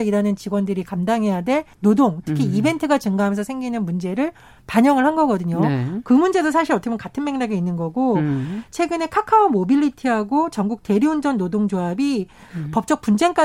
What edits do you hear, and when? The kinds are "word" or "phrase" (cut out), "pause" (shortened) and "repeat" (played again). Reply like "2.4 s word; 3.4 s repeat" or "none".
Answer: 1.7 s pause